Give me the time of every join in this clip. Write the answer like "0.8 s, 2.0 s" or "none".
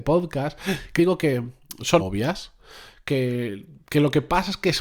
1.0 s, 2.0 s